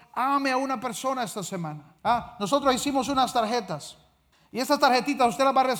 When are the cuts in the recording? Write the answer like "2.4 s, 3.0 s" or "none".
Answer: 2.0 s, 4.3 s